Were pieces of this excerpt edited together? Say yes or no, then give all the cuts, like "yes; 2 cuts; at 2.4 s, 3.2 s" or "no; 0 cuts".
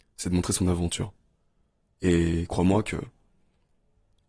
no; 0 cuts